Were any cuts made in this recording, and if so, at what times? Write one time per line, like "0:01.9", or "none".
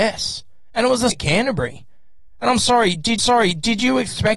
0:01.1
0:03.2